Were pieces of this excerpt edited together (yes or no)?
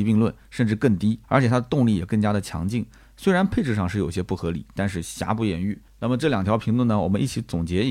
yes